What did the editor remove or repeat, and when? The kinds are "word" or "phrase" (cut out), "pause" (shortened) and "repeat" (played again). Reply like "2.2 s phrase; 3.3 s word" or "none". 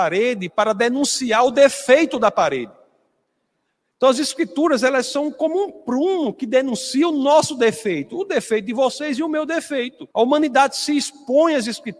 10.1 s pause